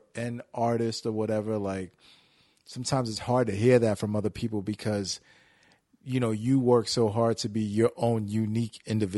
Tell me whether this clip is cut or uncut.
uncut